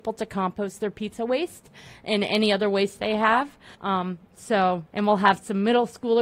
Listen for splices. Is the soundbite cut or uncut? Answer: cut